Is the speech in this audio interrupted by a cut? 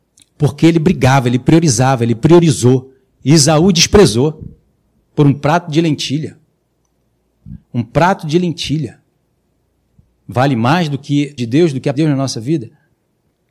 yes; 3 cuts; at 7.6 s, 11.4 s, 11.9 s

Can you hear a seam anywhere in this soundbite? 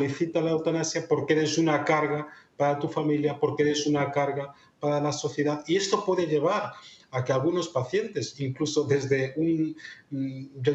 no; 0 cuts

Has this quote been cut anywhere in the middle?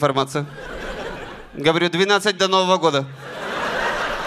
yes; 1 cut; at 2.4 s

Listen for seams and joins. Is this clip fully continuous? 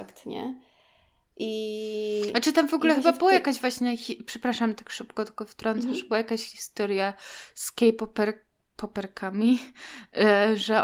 yes; 0 cuts

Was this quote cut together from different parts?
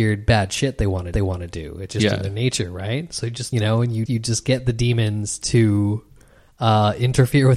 yes; 3 cuts; at 1.1 s, 3.5 s, 4.1 s

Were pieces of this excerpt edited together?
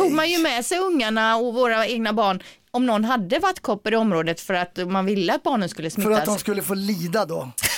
no; 0 cuts

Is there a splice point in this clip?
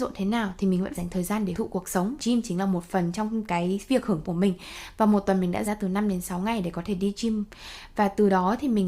yes; 5 cuts; at 0.9 s, 1.5 s, 2.2 s, 4.2 s, 5.6 s

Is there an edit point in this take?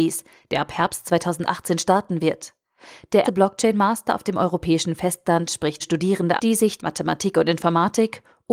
yes; 4 cuts; at 3.2 s, 5.8 s, 6.4 s, 6.8 s

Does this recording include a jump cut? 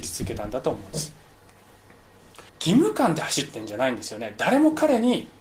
yes; 1 cut; at 2.5 s

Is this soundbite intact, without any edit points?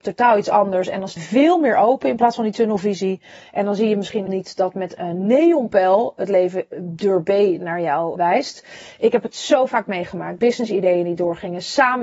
no; 5 cuts; at 1.2 s, 4.3 s, 5.0 s, 8.2 s, 10.4 s

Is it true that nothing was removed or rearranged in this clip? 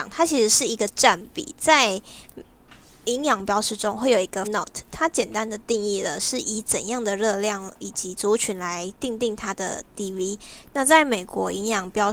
no; 1 cut; at 4.4 s

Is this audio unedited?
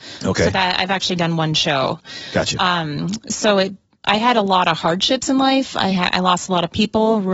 yes; 0 cuts

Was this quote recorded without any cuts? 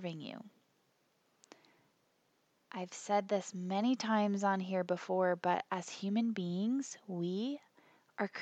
yes; 0 cuts

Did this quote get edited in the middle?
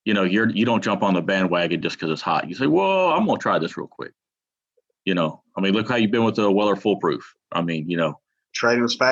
no; 0 cuts

